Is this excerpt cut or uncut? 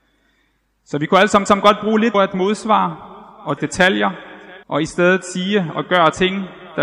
cut